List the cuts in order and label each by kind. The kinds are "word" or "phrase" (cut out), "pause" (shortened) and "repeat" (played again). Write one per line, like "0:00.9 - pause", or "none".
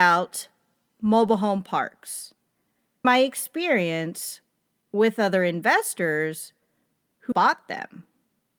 0:03.0 - word
0:07.3 - word